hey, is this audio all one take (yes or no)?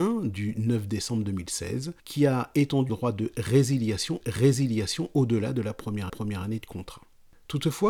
no